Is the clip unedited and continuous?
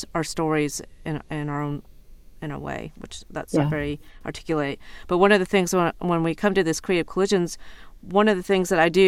yes; 0 cuts

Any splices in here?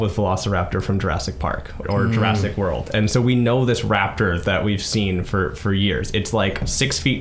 yes; 1 cut; at 1.8 s

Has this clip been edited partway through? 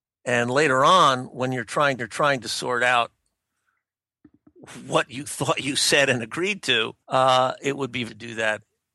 yes; 3 cuts; at 2.0 s, 7.0 s, 8.1 s

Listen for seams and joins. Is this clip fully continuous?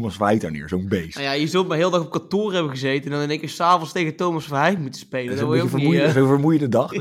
yes; 0 cuts

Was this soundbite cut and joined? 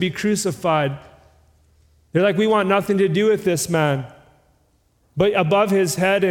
no; 0 cuts

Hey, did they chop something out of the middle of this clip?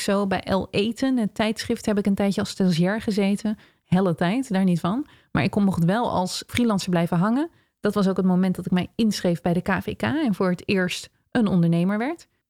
yes; 1 cut; at 6.5 s

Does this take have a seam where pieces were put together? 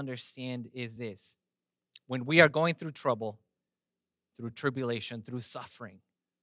no; 0 cuts

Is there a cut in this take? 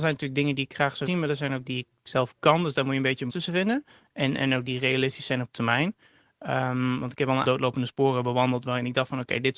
yes; 6 cuts; at 1.1 s, 1.7 s, 3.3 s, 4.7 s, 5.5 s, 7.4 s

